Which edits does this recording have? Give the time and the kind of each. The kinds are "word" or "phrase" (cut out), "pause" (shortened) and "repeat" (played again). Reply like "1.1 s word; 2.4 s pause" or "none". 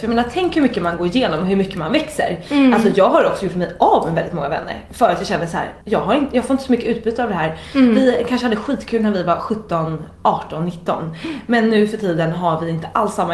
5.8 s pause